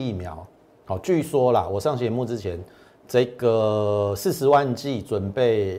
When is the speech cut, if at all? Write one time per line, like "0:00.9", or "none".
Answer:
none